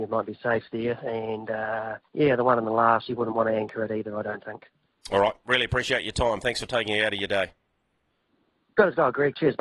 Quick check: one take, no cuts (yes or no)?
no